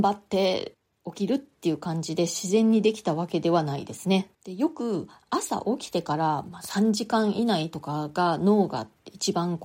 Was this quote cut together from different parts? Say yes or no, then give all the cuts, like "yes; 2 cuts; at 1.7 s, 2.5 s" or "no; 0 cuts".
yes; 1 cut; at 4.3 s